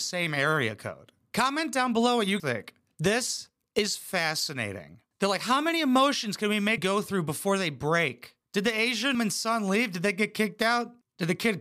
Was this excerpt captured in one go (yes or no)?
no